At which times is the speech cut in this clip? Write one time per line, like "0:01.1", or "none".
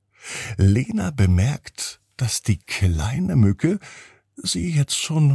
none